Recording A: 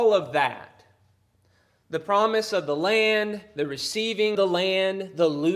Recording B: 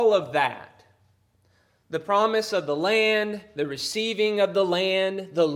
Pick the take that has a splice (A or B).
A